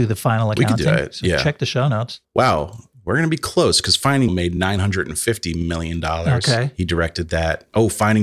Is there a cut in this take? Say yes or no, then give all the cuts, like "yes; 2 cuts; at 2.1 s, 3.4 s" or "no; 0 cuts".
yes; 1 cut; at 4.3 s